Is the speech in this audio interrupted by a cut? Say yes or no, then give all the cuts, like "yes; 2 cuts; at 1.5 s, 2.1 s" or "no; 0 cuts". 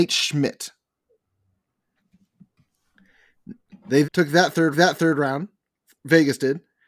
yes; 2 cuts; at 4.0 s, 4.7 s